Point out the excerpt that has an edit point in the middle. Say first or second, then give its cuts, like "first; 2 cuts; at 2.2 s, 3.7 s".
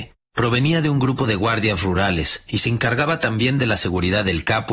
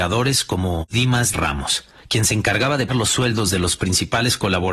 second; 2 cuts; at 1.3 s, 2.9 s